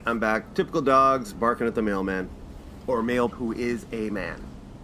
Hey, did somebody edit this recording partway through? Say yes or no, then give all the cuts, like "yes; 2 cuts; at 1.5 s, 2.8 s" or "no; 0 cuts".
yes; 1 cut; at 3.3 s